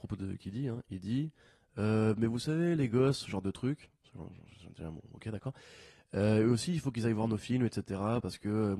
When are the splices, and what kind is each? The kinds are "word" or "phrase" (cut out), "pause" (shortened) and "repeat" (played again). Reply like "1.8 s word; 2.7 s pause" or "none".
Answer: none